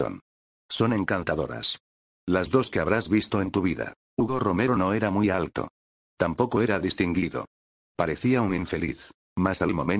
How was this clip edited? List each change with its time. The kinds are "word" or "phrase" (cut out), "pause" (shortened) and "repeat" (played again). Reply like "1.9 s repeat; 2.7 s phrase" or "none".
2.7 s phrase

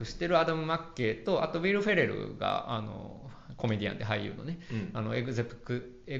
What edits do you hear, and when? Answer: none

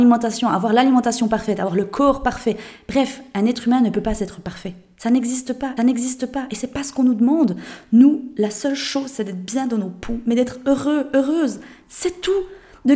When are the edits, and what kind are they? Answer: 5.8 s repeat

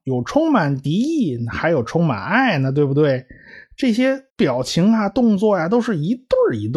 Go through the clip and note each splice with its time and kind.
4.3 s pause

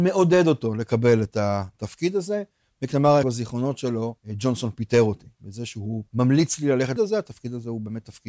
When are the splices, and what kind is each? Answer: 3.2 s word; 4.2 s pause; 5.3 s pause; 6.1 s pause; 7.0 s word

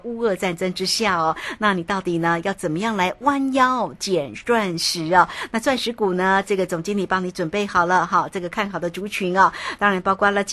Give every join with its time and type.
none

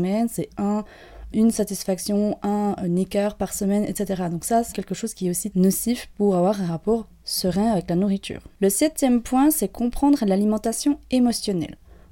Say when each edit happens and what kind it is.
1.3 s word; 4.7 s word; 5.5 s word

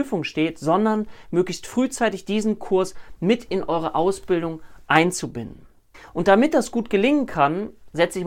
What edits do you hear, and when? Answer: 5.9 s pause

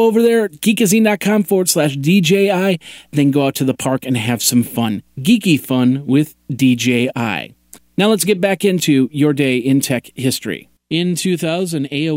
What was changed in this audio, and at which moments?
5.1 s pause; 10.8 s pause

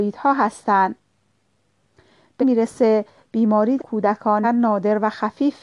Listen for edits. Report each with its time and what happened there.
2.4 s word; 3.8 s word; 4.4 s word

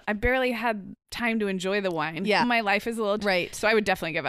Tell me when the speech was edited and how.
1.0 s pause; 2.4 s word; 3.2 s word

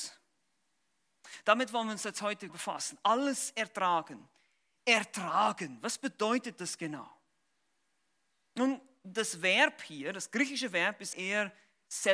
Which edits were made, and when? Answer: 2.5 s word; 11.1 s word

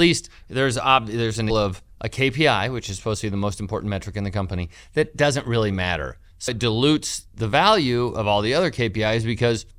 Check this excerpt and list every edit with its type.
1.5 s word; 6.5 s word

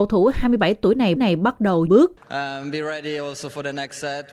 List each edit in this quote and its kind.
1.2 s repeat; 1.9 s word; 2.2 s pause

